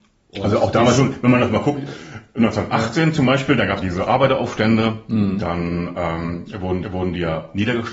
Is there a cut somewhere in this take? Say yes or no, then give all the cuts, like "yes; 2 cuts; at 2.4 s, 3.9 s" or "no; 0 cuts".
yes; 2 cuts; at 3.8 s, 6.8 s